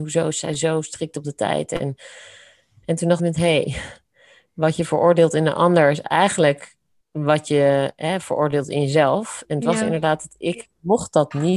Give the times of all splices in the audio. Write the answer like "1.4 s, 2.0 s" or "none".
3.2 s